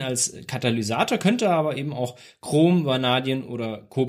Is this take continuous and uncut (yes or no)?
yes